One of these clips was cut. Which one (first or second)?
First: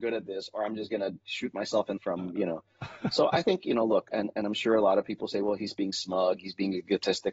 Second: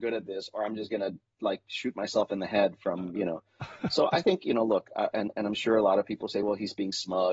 first